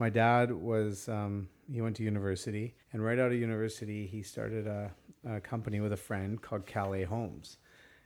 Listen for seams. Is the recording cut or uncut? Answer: cut